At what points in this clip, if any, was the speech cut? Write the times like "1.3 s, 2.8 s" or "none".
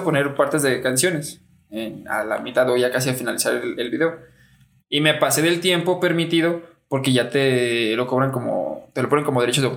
none